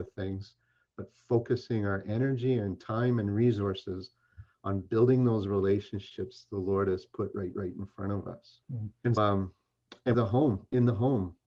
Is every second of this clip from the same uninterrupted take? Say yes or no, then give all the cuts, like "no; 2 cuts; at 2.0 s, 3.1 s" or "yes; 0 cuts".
no; 4 cuts; at 7.5 s, 8.6 s, 9.2 s, 10.1 s